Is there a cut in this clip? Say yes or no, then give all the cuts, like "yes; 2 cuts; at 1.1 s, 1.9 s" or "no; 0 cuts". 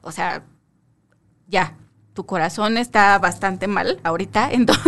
no; 0 cuts